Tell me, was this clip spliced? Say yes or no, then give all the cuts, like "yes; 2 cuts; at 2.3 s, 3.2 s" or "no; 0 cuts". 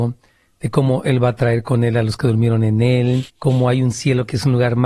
yes; 1 cut; at 3.3 s